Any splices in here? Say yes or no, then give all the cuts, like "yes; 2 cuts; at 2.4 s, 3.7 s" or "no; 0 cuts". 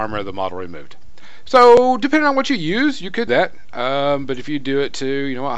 yes; 1 cut; at 3.3 s